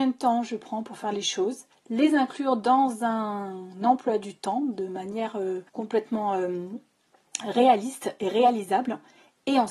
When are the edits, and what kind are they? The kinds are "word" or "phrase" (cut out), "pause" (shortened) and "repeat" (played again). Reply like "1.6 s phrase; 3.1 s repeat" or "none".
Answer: 1.7 s pause; 5.7 s pause